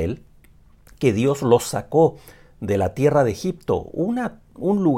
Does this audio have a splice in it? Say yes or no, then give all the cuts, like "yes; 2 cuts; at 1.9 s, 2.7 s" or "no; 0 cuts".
no; 0 cuts